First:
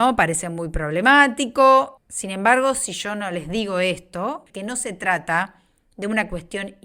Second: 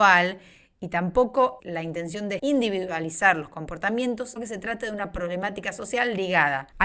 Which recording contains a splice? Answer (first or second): second